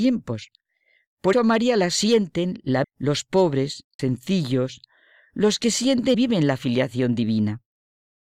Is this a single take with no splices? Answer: no; 4 cuts; at 1.3 s, 2.8 s, 4.0 s, 6.1 s

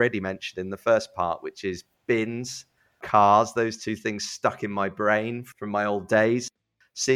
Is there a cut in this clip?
no; 0 cuts

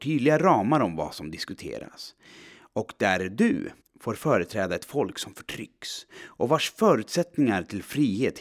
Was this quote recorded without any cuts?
no; 1 cut; at 3.8 s

